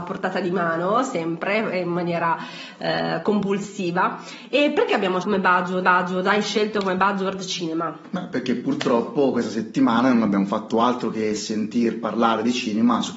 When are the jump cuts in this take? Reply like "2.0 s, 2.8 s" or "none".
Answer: 5.2 s, 5.8 s